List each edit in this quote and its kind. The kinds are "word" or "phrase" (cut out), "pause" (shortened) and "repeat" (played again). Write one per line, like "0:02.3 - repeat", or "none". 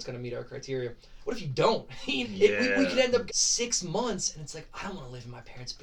0:02.2 - word
0:03.3 - word